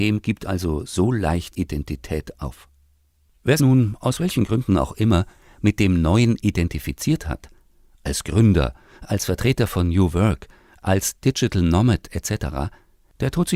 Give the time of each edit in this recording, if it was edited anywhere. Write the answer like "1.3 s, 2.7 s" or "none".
1.5 s, 3.6 s